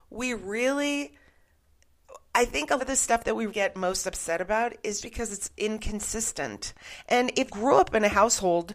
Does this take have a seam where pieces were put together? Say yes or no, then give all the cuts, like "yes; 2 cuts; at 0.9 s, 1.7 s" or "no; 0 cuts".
yes; 4 cuts; at 2.8 s, 3.5 s, 5.0 s, 7.5 s